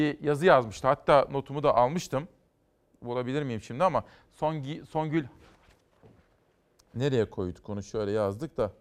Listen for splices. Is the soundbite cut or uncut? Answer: uncut